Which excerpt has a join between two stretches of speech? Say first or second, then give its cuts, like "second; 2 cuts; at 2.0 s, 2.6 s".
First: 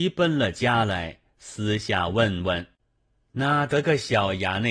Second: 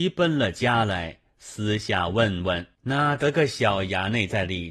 second; 1 cut; at 2.8 s